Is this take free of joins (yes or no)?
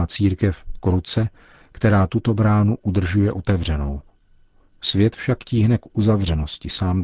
yes